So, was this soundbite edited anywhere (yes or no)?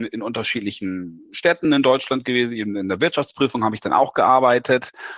no